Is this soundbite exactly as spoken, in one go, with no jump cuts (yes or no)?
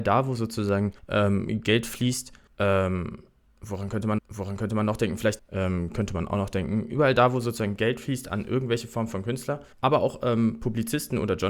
no